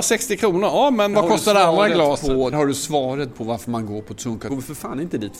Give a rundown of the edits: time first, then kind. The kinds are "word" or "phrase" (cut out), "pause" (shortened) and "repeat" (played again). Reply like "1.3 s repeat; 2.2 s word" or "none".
1.1 s word; 2.5 s word; 4.5 s word